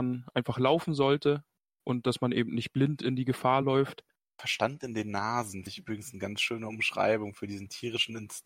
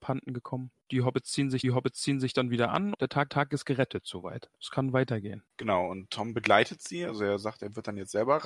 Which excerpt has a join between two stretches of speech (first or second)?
second